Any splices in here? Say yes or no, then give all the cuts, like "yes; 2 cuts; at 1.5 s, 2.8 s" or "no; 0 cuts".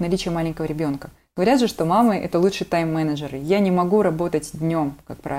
no; 0 cuts